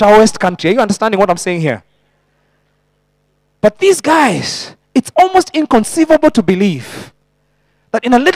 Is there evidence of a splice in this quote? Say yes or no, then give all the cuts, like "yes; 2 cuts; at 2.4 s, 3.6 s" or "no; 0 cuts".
no; 0 cuts